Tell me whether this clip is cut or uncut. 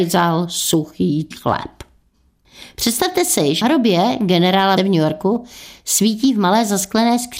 cut